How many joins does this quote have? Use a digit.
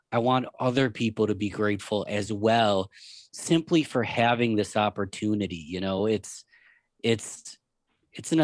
0